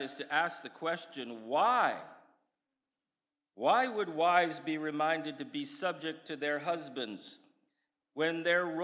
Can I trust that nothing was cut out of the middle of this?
yes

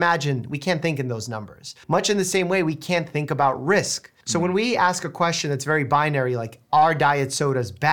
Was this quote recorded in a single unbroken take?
no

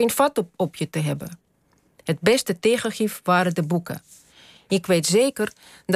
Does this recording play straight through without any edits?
yes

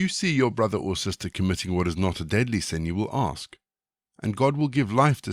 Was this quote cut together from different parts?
no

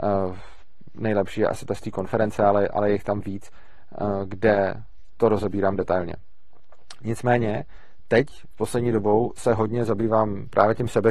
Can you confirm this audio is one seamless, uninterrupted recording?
yes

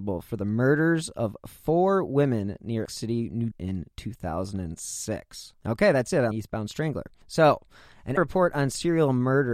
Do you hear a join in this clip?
yes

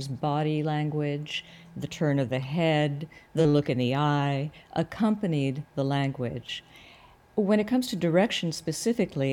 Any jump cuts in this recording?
no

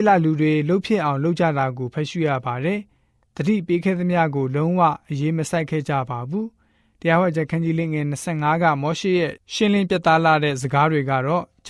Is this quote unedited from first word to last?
yes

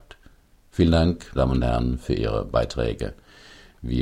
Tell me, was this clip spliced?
yes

